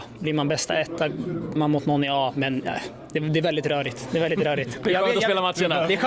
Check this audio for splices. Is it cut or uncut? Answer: cut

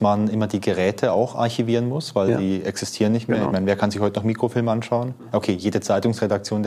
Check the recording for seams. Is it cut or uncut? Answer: uncut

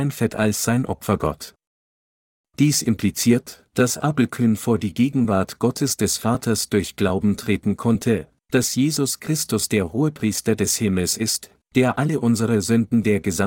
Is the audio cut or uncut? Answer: uncut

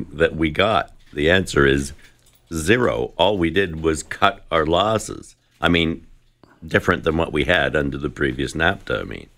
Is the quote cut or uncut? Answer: uncut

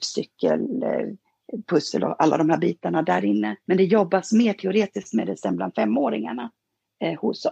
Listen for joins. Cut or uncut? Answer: cut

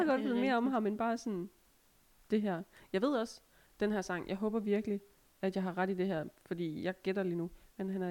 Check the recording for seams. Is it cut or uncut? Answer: uncut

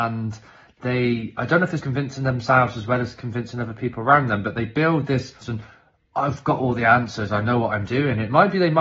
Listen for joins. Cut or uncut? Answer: cut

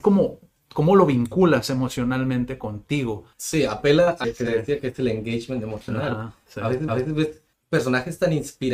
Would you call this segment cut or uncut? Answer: cut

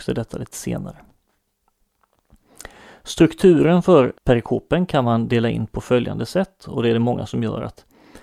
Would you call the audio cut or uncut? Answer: cut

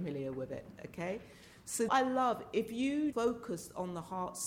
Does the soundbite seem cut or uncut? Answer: cut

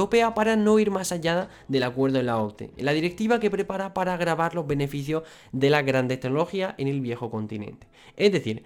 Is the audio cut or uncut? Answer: uncut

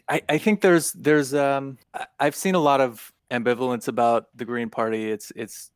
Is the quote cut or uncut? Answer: cut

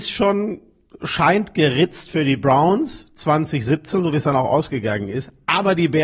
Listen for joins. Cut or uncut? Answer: uncut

